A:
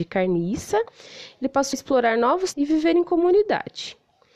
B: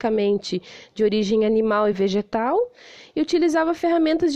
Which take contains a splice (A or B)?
A